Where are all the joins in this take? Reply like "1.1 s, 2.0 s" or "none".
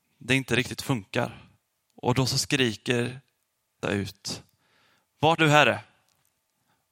3.8 s, 5.4 s